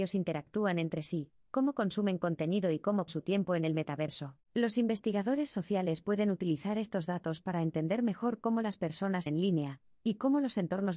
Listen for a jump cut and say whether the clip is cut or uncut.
cut